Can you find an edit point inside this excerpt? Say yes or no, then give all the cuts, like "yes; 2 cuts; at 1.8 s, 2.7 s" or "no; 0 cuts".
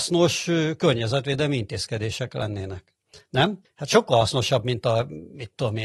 yes; 1 cut; at 3.6 s